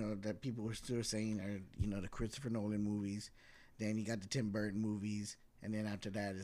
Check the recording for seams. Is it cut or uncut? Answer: uncut